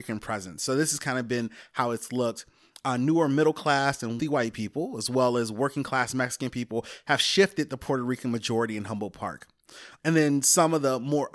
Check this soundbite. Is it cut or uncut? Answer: cut